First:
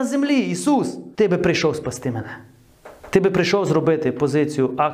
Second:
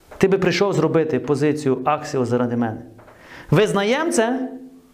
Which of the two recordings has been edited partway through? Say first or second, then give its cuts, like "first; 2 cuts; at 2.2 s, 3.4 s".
first; 2 cuts; at 1.1 s, 3.0 s